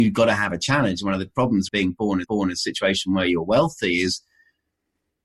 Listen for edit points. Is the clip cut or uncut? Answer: cut